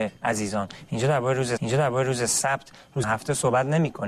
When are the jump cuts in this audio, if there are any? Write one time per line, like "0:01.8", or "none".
0:01.6
0:03.0